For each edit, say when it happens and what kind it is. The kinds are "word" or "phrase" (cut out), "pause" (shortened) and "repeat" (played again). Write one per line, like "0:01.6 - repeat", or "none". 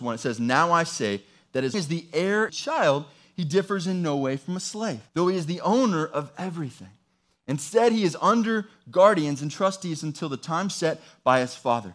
0:01.7 - word
0:02.5 - phrase
0:05.1 - pause